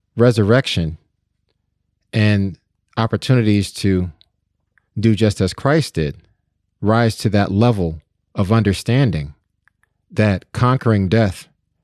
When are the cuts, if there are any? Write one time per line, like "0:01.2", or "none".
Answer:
none